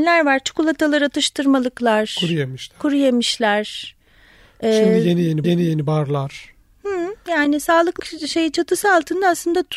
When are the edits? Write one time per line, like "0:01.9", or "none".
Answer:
0:05.4
0:08.0